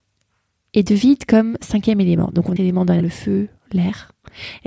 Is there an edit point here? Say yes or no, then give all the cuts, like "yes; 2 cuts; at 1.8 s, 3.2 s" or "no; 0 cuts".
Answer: yes; 2 cuts; at 2.6 s, 3.0 s